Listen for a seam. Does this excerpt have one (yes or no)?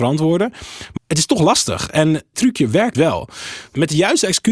yes